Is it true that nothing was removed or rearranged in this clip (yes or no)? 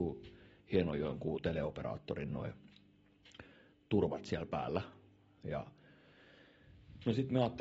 yes